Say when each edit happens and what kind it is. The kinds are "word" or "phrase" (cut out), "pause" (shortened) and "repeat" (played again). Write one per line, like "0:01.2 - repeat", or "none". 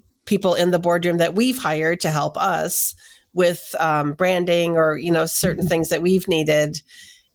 none